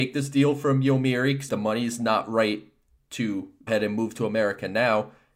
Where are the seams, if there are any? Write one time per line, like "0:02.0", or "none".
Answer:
0:01.5
0:03.7